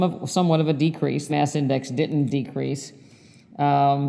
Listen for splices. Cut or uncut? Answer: cut